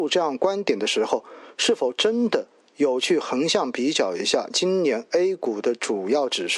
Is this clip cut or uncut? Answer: uncut